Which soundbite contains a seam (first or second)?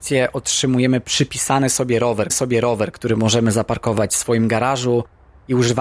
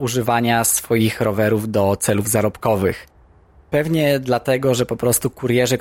first